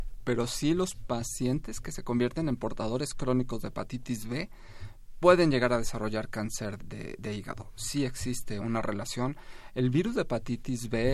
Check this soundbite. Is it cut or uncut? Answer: cut